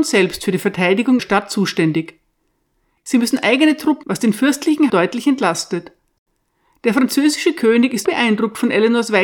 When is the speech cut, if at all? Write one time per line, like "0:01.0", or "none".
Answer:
0:01.2
0:04.0
0:04.9
0:08.0